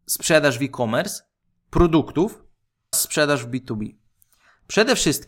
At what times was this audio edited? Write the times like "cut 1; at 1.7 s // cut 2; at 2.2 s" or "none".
cut 1; at 2.9 s